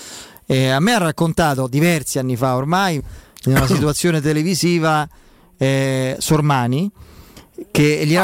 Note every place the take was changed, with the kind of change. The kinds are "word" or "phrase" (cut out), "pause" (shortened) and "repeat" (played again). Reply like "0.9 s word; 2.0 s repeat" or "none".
3.0 s word